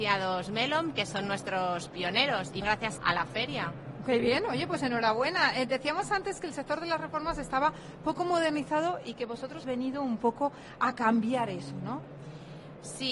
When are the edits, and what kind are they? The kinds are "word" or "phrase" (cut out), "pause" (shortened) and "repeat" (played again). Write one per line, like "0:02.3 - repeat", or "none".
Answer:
0:02.6 - word
0:03.0 - word
0:09.6 - word